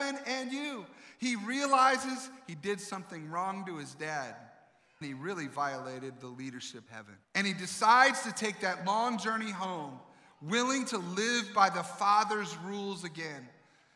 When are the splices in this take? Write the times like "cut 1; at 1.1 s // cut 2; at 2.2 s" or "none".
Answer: cut 1; at 5.0 s // cut 2; at 6.9 s // cut 3; at 7.2 s